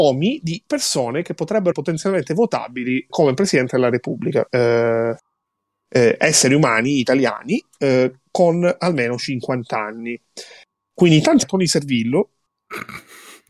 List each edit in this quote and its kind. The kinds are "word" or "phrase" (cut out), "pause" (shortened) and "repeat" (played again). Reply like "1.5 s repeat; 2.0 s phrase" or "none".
1.7 s word; 3.1 s word; 4.5 s word; 11.4 s word